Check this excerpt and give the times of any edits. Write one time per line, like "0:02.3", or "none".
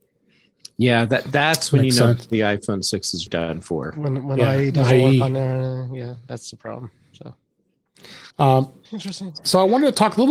0:03.3
0:08.3